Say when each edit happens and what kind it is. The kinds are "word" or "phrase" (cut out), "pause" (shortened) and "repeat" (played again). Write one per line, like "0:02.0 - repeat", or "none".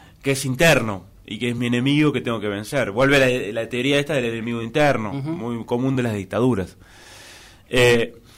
none